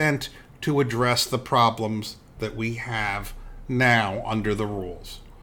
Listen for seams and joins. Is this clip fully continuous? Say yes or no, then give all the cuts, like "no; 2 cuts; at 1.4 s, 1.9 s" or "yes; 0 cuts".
yes; 0 cuts